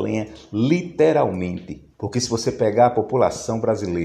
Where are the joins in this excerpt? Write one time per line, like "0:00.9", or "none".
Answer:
0:01.9